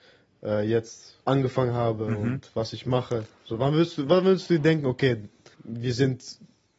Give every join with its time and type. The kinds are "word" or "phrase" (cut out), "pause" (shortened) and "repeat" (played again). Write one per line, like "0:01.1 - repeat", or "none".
0:01.2 - pause
0:05.5 - word